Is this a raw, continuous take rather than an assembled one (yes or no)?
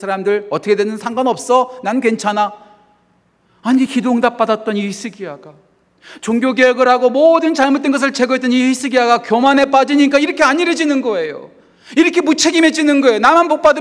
yes